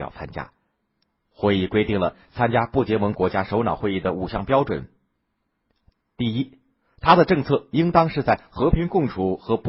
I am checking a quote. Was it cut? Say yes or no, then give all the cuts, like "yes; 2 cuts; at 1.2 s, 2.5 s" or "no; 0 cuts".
no; 0 cuts